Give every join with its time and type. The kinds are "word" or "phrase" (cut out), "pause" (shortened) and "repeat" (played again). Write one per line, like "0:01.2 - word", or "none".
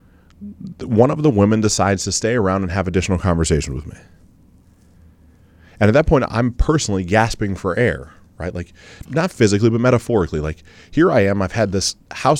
0:09.0 - word